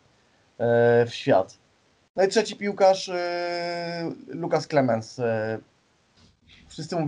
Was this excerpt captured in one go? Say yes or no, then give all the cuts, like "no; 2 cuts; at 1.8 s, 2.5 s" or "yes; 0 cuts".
yes; 0 cuts